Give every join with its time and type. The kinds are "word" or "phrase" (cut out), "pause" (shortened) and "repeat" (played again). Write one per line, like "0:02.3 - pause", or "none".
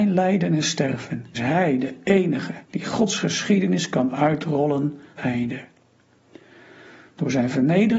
0:01.4 - word
0:02.6 - pause
0:05.2 - phrase